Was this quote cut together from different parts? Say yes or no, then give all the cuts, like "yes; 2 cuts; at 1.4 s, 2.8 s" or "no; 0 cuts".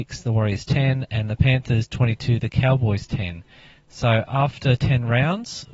no; 0 cuts